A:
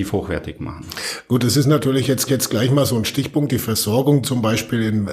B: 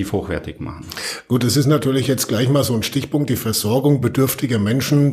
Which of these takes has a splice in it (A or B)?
A